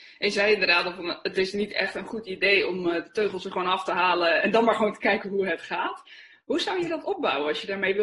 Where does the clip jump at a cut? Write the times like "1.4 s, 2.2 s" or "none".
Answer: 4.4 s